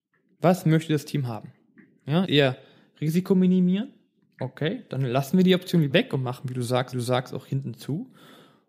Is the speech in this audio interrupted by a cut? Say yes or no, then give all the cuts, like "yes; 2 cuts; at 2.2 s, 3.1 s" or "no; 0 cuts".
yes; 3 cuts; at 2.2 s, 5.9 s, 6.9 s